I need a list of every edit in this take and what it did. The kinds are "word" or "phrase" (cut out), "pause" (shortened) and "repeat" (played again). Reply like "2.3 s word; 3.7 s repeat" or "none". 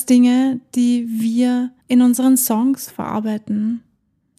1.8 s pause